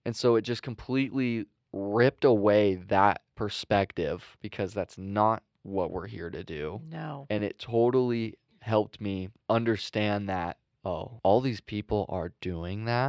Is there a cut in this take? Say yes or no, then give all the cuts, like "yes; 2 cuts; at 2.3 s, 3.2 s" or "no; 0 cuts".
no; 0 cuts